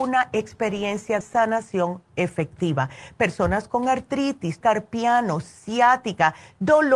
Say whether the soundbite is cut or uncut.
cut